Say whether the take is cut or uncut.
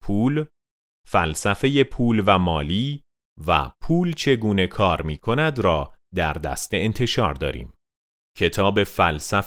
uncut